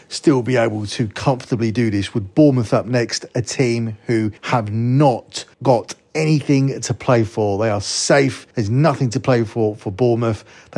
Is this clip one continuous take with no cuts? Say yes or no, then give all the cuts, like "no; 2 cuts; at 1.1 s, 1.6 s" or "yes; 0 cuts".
no; 3 cuts; at 4.4 s, 5.5 s, 8.5 s